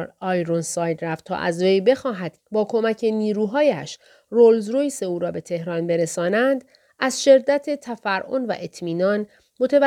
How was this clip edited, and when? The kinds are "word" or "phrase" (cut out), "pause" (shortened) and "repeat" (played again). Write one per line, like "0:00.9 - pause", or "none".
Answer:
0:02.4 - word